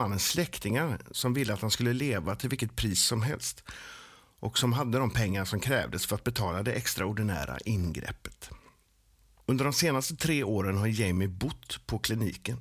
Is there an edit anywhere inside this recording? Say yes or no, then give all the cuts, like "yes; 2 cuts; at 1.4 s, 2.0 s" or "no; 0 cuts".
no; 0 cuts